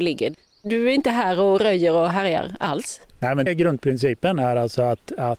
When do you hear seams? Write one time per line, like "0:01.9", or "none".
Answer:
0:03.5